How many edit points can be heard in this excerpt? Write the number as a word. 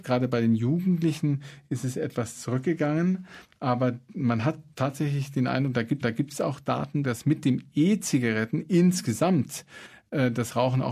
two